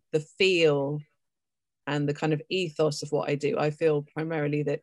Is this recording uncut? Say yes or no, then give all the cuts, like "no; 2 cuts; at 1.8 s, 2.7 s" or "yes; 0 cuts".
yes; 0 cuts